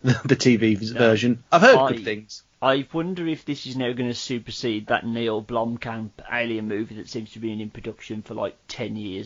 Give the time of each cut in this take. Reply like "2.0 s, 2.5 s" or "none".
none